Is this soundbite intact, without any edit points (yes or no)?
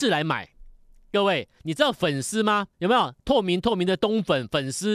no